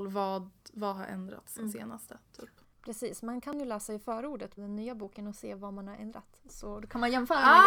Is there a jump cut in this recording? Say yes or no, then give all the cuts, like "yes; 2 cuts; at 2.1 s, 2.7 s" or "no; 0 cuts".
yes; 1 cut; at 4.6 s